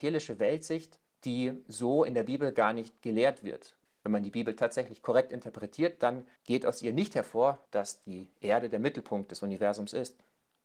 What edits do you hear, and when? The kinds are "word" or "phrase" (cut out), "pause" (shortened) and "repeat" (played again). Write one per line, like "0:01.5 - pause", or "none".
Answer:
0:01.1 - pause
0:03.9 - pause
0:06.4 - pause
0:07.7 - pause